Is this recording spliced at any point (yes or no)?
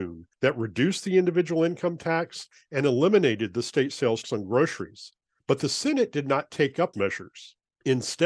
yes